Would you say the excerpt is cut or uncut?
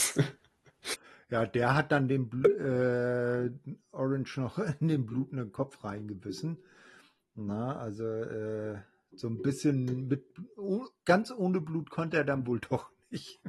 uncut